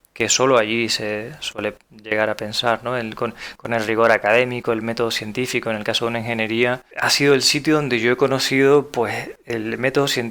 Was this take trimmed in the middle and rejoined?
yes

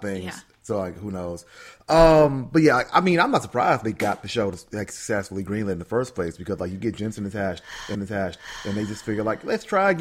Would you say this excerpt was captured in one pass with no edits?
no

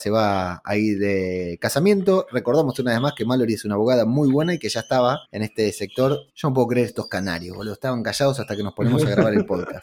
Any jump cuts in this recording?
yes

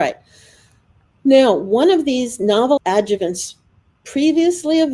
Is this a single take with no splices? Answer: no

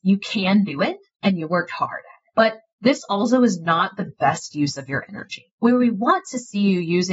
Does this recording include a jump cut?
no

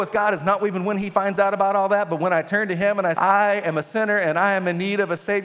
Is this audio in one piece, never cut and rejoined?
no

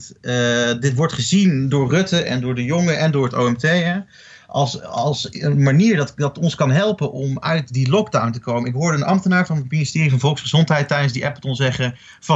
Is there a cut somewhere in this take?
no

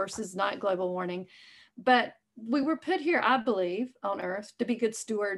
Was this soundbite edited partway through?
no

